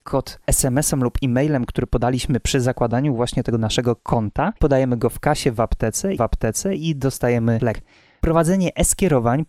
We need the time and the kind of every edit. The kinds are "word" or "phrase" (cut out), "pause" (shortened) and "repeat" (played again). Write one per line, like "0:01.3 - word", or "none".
0:04.6 - pause
0:06.2 - repeat
0:07.6 - word